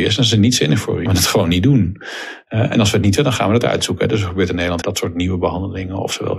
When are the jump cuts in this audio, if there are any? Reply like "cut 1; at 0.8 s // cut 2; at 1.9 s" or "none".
cut 1; at 1.1 s // cut 2; at 3.2 s // cut 3; at 4.8 s